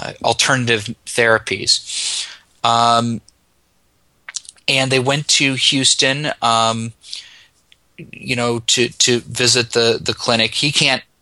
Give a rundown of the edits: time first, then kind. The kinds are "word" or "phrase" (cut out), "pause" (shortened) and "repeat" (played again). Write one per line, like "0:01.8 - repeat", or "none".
none